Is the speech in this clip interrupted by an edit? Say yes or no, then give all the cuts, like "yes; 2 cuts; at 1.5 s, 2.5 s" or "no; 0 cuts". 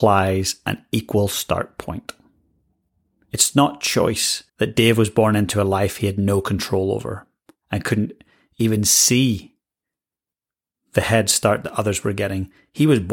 yes; 1 cut; at 4.5 s